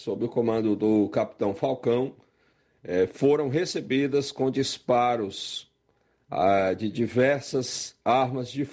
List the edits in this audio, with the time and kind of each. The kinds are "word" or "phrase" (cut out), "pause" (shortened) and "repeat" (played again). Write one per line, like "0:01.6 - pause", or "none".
none